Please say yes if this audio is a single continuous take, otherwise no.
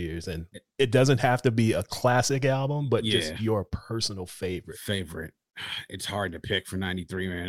yes